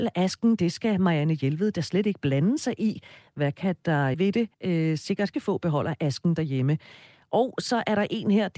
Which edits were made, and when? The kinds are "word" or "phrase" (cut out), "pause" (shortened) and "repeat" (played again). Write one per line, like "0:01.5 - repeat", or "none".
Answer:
0:04.1 - phrase
0:04.5 - pause
0:05.3 - word